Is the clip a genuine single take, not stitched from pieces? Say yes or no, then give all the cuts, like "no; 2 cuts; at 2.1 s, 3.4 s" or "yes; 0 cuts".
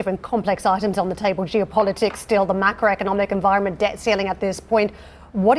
yes; 0 cuts